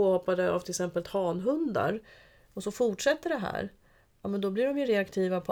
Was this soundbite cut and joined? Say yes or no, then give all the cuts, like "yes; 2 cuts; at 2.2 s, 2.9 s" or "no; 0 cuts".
no; 0 cuts